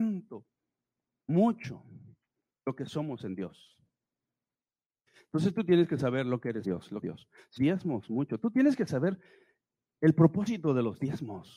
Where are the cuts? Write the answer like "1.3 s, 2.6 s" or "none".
6.6 s, 7.0 s, 7.6 s